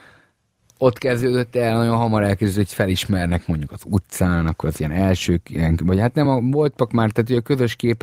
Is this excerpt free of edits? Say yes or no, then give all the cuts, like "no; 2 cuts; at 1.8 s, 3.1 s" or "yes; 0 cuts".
yes; 0 cuts